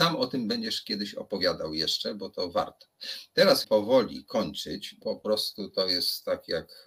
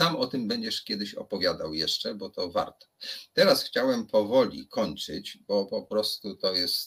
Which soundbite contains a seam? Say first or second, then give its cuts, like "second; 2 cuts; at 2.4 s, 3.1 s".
first; 2 cuts; at 3.6 s, 5.0 s